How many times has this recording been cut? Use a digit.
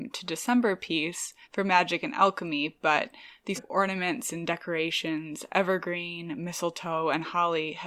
2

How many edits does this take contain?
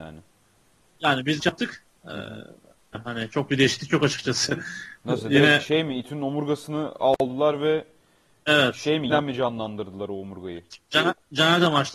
3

